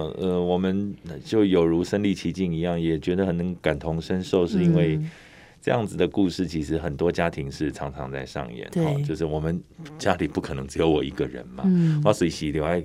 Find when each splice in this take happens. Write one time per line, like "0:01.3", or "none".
none